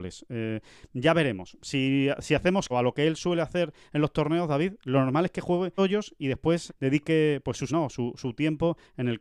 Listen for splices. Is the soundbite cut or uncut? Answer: cut